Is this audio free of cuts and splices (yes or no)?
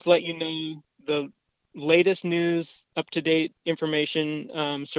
yes